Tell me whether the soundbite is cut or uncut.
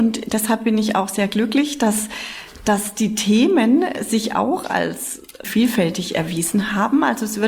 cut